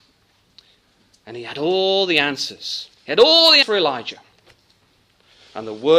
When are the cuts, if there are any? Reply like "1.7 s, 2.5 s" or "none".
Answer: 2.9 s, 3.6 s

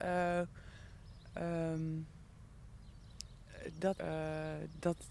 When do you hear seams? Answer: 3.9 s

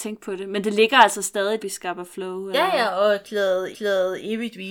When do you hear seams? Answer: 1.6 s, 3.7 s

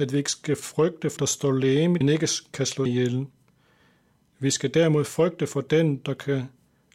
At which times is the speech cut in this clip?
1.2 s, 2.0 s, 2.9 s

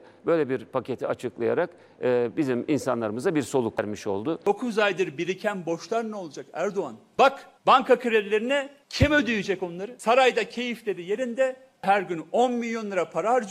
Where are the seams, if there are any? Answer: 7.6 s

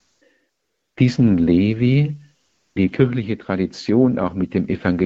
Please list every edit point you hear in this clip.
2.8 s

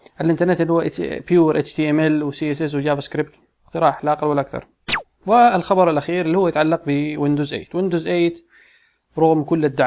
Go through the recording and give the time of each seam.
none

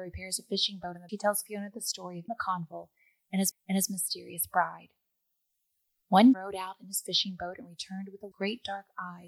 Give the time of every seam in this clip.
1.1 s, 2.3 s, 3.5 s, 6.3 s, 8.3 s

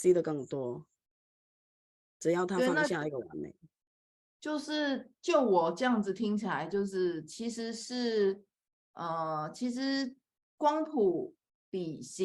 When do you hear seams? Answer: none

